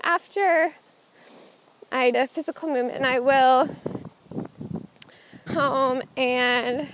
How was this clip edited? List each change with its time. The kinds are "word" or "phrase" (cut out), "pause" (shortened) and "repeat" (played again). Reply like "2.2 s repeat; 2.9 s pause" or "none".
2.1 s word; 3.0 s word; 5.5 s word